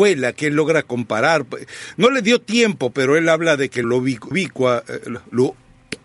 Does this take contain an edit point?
yes; 3 cuts; at 2.9 s, 3.8 s, 4.3 s

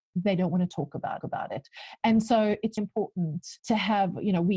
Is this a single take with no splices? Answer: no; 3 cuts; at 1.2 s, 2.8 s, 3.6 s

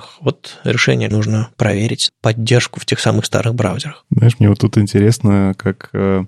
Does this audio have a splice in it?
yes; 2 cuts; at 1.1 s, 2.1 s

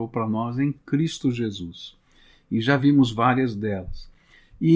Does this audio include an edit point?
no; 0 cuts

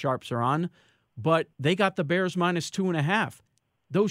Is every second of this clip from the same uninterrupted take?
no; 1 cut; at 1.5 s

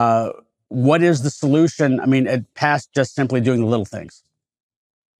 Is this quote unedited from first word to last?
yes; 0 cuts

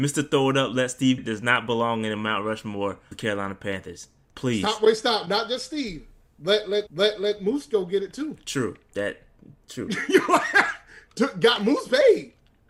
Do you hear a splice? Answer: yes; 3 cuts; at 1.2 s, 3.1 s, 6.9 s

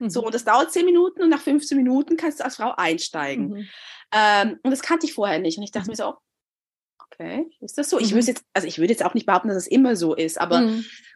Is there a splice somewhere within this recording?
no; 0 cuts

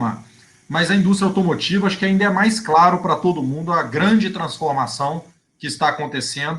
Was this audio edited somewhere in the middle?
no; 0 cuts

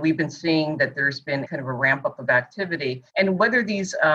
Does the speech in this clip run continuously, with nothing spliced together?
no; 2 cuts; at 1.4 s, 3.1 s

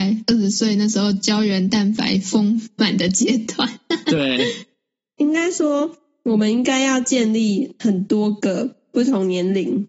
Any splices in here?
yes; 1 cut; at 4.7 s

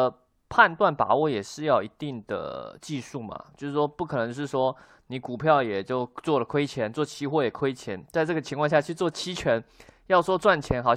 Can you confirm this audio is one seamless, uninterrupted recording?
yes; 0 cuts

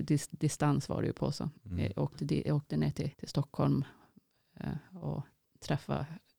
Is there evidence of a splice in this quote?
yes; 2 cuts; at 1.6 s, 3.1 s

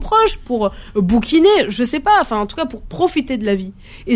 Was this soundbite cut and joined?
no; 0 cuts

